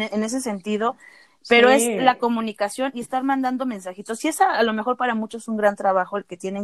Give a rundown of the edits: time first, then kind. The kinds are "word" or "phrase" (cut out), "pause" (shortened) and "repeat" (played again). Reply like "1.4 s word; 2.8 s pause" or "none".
none

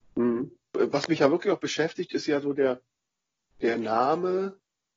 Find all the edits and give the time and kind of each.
none

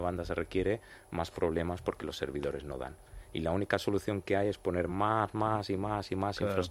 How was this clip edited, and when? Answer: none

